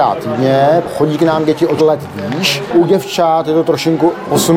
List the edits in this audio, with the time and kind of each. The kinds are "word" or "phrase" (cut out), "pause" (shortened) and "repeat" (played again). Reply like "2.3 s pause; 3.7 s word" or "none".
1.8 s word